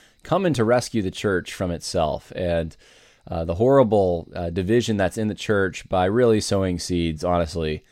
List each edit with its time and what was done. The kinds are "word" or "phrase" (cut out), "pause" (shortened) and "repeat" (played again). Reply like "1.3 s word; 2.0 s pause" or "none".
none

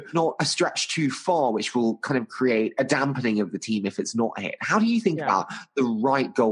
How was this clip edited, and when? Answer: none

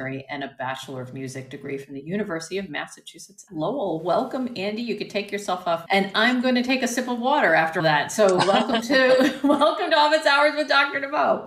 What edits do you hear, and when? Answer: 3.5 s word; 5.9 s word; 7.8 s word

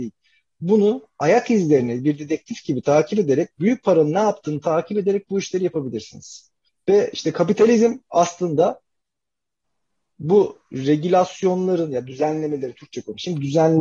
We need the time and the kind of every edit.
6.7 s pause

